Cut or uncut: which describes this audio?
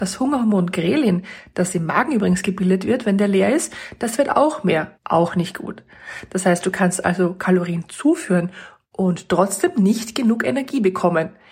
cut